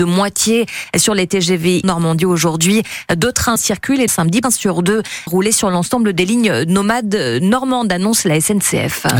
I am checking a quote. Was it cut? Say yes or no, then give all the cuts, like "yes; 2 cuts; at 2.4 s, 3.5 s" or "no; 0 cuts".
yes; 5 cuts; at 1.8 s, 3.6 s, 4.1 s, 4.4 s, 5.3 s